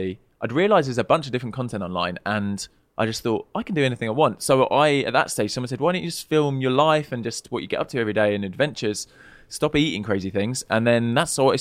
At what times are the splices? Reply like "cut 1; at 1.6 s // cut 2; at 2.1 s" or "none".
none